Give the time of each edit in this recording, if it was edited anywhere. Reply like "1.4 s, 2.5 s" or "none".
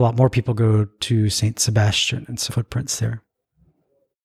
2.5 s